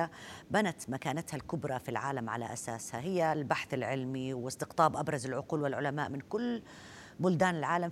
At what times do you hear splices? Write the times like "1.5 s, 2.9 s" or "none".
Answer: none

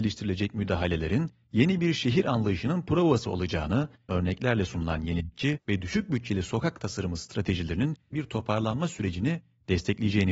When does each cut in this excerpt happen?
4.1 s, 8.1 s

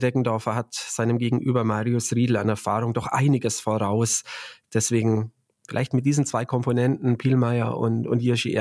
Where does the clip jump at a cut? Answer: none

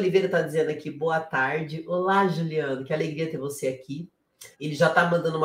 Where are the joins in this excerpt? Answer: 4.5 s

